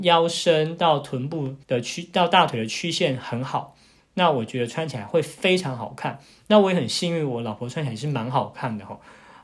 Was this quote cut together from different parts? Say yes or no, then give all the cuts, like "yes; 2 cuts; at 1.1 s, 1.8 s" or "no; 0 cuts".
yes; 1 cut; at 1.6 s